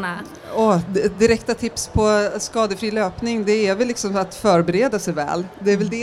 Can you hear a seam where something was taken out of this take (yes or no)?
no